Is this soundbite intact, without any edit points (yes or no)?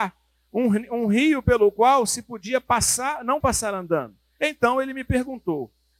no